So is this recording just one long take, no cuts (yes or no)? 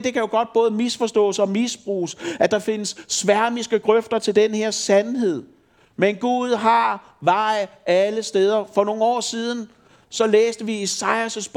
yes